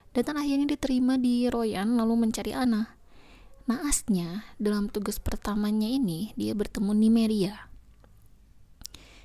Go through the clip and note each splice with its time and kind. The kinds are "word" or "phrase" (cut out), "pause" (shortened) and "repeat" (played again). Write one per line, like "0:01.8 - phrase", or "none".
none

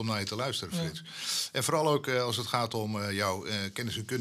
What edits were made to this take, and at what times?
none

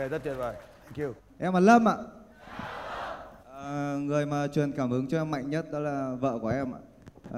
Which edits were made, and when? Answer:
0:01.2 - pause
0:03.4 - pause

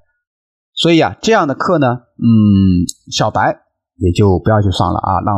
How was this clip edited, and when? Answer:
none

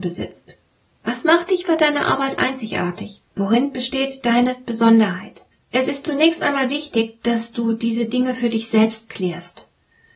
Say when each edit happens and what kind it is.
0:03.3 - pause
0:05.5 - pause

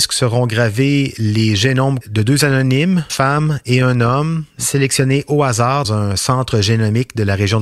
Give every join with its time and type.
0:02.0 - word
0:03.1 - word
0:05.8 - word

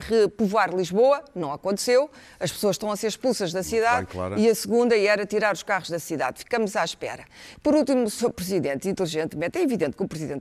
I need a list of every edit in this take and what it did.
none

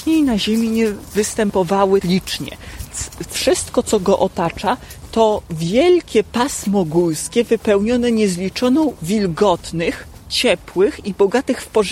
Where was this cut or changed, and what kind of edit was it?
0:02.0 - word
0:03.2 - phrase
0:09.0 - word

